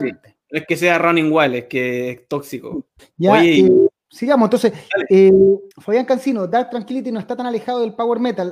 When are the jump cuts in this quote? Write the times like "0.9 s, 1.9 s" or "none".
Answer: 3.0 s, 4.0 s, 5.7 s